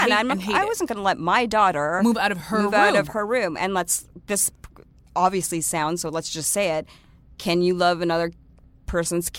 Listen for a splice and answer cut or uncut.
uncut